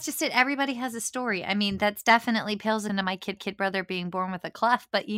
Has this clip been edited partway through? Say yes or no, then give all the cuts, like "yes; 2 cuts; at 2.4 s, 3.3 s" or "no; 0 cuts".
yes; 2 cuts; at 2.9 s, 3.4 s